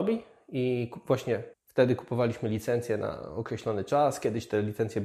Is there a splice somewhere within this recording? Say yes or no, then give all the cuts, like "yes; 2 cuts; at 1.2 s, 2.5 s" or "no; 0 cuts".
yes; 1 cut; at 1.5 s